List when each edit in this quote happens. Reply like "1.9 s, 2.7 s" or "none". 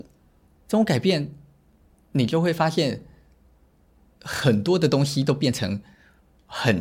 none